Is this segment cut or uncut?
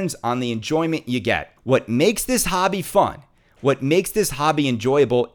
uncut